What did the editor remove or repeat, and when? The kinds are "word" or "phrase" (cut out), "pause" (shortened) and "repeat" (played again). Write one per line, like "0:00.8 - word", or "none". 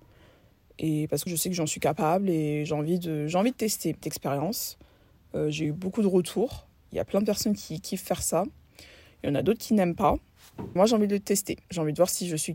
0:01.3 - word
0:04.0 - word
0:10.8 - word
0:11.6 - pause